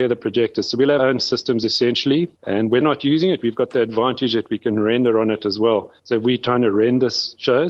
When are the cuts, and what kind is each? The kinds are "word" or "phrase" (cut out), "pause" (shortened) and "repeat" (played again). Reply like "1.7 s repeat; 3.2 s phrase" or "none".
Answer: 1.0 s word; 2.4 s pause; 2.8 s word; 6.0 s pause